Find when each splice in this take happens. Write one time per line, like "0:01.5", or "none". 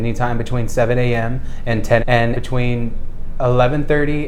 0:02.0
0:02.3